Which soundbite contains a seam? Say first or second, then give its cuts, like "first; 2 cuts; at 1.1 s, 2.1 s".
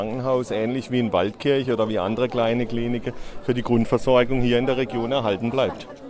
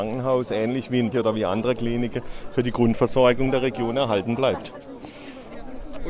second; 3 cuts; at 1.1 s, 1.8 s, 3.5 s